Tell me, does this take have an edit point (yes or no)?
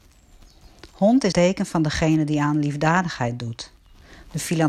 yes